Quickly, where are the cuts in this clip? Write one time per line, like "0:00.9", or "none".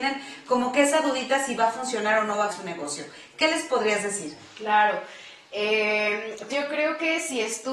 0:02.5
0:06.5